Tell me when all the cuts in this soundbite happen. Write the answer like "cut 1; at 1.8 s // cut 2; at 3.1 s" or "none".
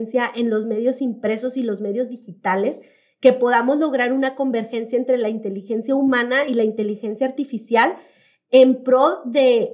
none